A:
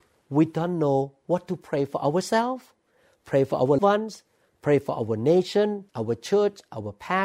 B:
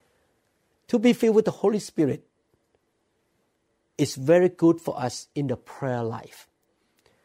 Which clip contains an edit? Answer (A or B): A